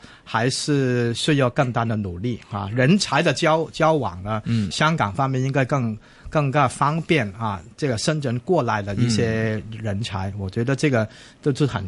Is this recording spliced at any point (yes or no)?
yes